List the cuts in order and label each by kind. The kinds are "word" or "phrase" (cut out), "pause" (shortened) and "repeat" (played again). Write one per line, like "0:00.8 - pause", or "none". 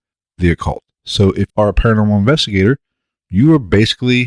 0:01.5 - word